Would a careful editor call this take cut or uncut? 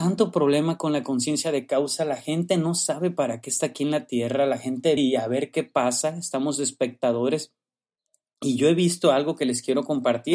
cut